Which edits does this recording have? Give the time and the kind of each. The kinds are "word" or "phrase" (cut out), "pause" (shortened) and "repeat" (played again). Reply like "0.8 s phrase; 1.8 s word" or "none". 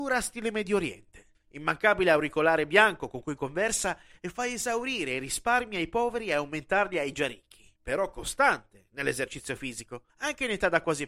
1.3 s pause; 7.8 s pause; 10.1 s pause